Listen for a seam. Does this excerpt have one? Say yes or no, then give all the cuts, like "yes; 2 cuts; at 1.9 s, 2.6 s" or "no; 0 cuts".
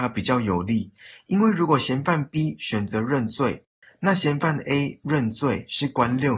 no; 0 cuts